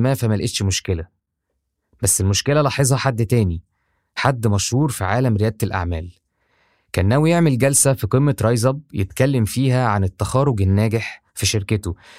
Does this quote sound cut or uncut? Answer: uncut